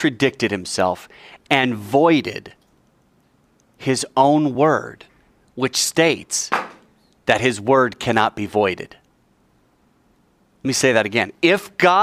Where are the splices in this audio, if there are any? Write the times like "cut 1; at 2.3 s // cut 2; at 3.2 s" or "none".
none

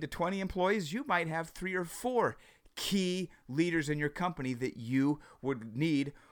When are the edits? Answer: none

